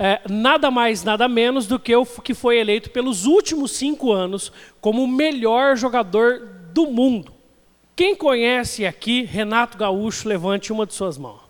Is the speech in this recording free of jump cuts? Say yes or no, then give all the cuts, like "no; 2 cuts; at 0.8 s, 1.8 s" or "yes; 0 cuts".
yes; 0 cuts